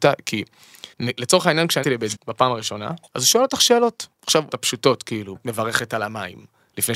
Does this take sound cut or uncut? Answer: cut